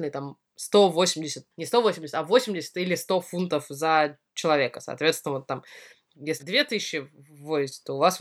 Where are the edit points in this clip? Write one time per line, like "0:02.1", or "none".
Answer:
0:01.5
0:06.4